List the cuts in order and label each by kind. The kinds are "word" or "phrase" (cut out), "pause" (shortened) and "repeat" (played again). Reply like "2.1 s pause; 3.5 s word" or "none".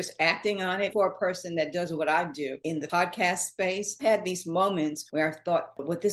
0.9 s word; 2.6 s word; 4.0 s word